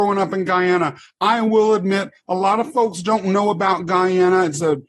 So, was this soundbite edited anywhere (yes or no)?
no